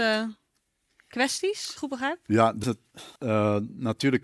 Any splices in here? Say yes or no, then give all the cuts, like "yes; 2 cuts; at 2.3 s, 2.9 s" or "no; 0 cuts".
yes; 3 cuts; at 1.8 s, 2.6 s, 3.2 s